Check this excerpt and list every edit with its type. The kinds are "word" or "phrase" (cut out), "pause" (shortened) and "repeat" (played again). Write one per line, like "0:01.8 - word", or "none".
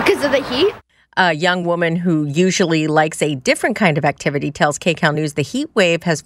none